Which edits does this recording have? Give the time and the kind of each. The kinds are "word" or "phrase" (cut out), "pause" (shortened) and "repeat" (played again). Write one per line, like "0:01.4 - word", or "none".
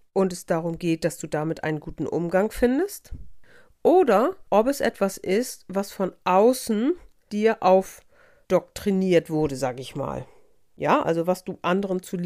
0:04.5 - pause